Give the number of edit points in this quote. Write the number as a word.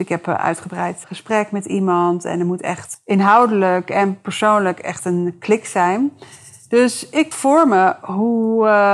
three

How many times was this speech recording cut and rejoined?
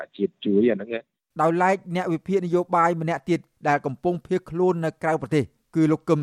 zero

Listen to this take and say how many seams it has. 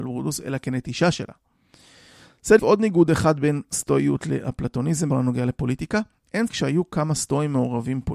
three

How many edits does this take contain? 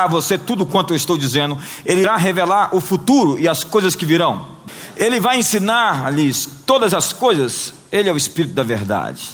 zero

